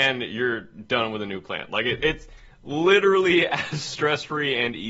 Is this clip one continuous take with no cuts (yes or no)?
yes